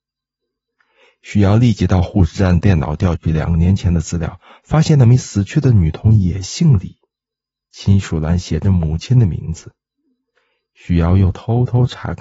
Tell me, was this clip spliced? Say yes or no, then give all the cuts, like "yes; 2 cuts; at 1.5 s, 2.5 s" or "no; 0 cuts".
no; 0 cuts